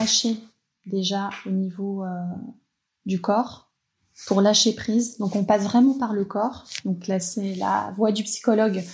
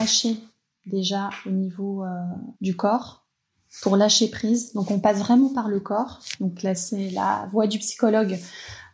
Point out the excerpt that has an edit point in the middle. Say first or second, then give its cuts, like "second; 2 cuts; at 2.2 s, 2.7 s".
second; 1 cut; at 2.5 s